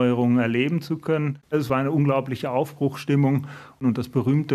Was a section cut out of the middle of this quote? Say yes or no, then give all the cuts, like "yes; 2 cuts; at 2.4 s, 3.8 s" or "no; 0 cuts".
yes; 1 cut; at 1.4 s